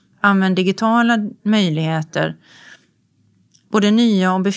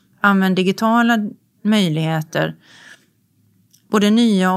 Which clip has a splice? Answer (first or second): first